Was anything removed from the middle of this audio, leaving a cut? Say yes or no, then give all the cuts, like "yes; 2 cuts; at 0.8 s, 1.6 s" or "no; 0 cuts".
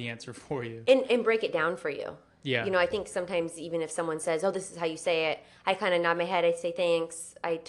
no; 0 cuts